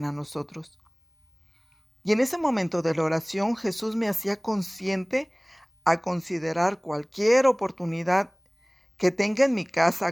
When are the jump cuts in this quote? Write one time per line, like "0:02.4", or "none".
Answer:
none

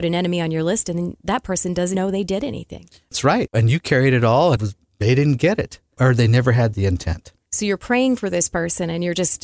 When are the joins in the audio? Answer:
0:01.9
0:04.6

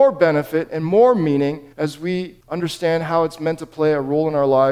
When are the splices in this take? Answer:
0:01.7
0:02.4

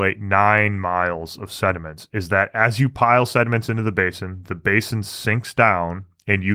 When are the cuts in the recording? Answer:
none

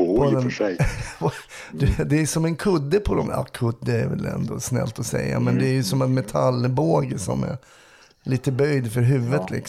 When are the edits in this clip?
none

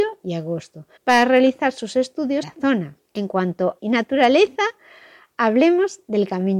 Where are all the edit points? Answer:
0:01.0
0:02.4
0:03.0
0:03.8

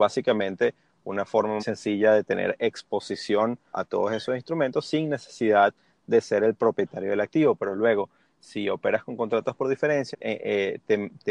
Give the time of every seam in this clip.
0:01.6
0:03.7
0:10.1

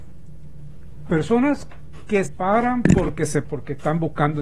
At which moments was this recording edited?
0:01.1
0:02.3
0:03.4

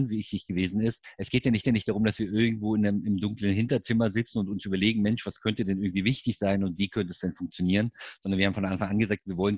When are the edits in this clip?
0:01.6

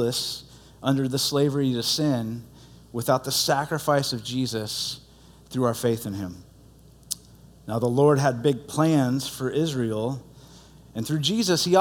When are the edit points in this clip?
none

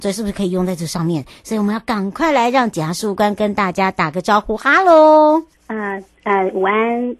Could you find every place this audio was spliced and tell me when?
0:05.5

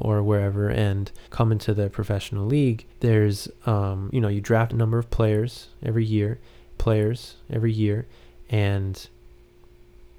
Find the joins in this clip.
0:01.3
0:02.9
0:04.1
0:04.7
0:06.8

